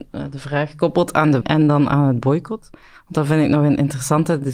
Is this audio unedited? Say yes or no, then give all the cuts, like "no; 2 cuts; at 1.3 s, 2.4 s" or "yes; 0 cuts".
no; 1 cut; at 1.4 s